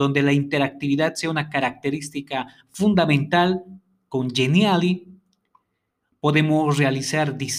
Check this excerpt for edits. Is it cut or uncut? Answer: uncut